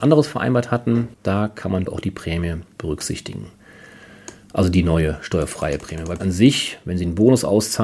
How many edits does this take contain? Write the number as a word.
four